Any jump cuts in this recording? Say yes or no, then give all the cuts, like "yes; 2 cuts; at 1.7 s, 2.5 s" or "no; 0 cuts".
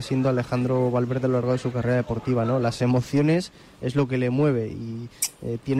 no; 0 cuts